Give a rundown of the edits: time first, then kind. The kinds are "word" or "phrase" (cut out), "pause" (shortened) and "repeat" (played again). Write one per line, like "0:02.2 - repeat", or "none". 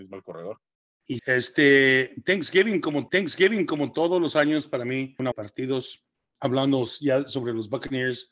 0:01.2 - word
0:03.1 - repeat
0:05.3 - phrase